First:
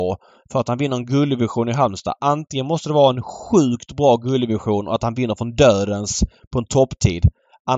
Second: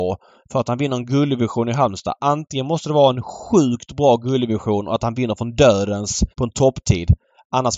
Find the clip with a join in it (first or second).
second